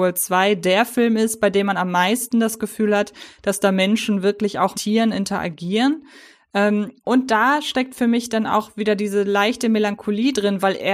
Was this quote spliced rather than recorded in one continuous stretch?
yes; 1 cut; at 4.7 s

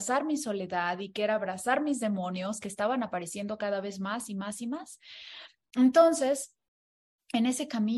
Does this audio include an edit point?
no; 0 cuts

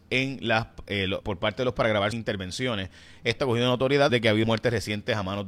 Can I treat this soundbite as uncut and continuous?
no; 6 cuts; at 1.2 s, 1.8 s, 2.1 s, 3.4 s, 4.1 s, 4.4 s

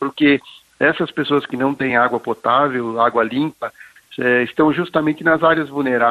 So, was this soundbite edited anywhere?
no; 0 cuts

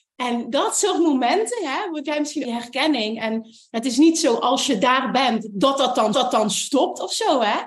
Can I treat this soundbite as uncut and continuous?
no; 2 cuts; at 2.4 s, 6.1 s

